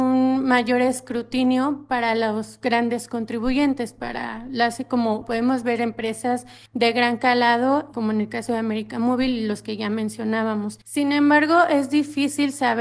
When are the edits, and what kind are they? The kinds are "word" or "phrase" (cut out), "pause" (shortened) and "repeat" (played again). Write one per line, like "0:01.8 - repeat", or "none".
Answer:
0:06.7 - pause
0:10.8 - pause